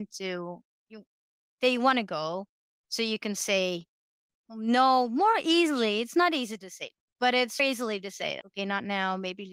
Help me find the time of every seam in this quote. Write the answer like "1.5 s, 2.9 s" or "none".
7.6 s, 8.4 s